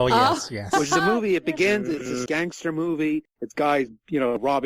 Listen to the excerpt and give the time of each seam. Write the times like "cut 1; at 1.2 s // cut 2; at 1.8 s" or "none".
cut 1; at 2.3 s